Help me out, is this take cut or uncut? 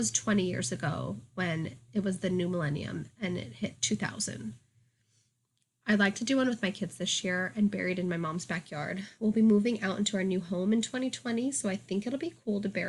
uncut